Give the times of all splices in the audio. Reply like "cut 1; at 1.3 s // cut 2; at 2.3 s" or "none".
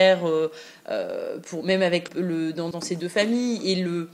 cut 1; at 2.1 s // cut 2; at 2.7 s